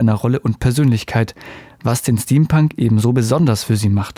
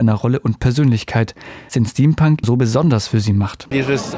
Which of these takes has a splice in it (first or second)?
second